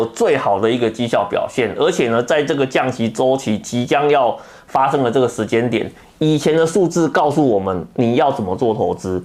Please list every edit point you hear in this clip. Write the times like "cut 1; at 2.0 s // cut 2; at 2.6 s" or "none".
none

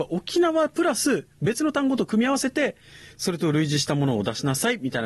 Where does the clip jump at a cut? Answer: none

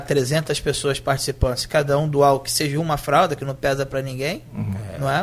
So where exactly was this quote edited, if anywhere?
none

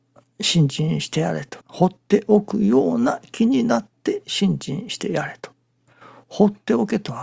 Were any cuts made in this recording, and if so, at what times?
cut 1; at 1.6 s

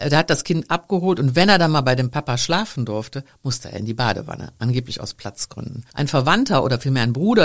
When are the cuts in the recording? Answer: cut 1; at 5.9 s

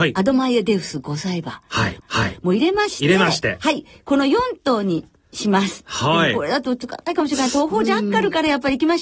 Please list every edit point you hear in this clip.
cut 1; at 2.0 s

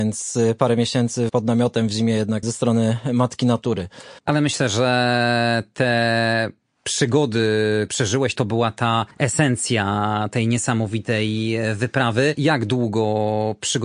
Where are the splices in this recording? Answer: cut 1; at 1.3 s // cut 2; at 2.4 s // cut 3; at 4.2 s // cut 4; at 7.9 s // cut 5; at 9.1 s

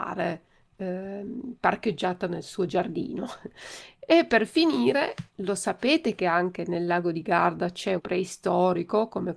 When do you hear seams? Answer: cut 1; at 5.3 s // cut 2; at 8.0 s

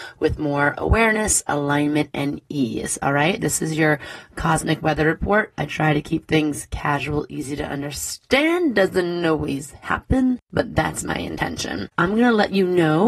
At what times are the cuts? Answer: cut 1; at 10.4 s // cut 2; at 11.9 s

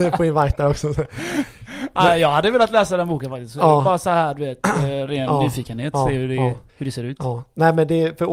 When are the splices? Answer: cut 1; at 6.7 s

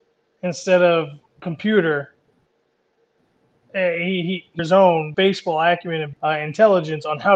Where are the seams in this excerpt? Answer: cut 1; at 1.4 s // cut 2; at 4.6 s // cut 3; at 5.1 s // cut 4; at 6.1 s

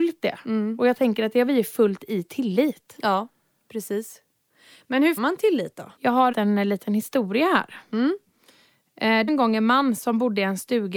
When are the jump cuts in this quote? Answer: cut 1; at 5.2 s // cut 2; at 6.0 s // cut 3; at 6.3 s // cut 4; at 9.3 s

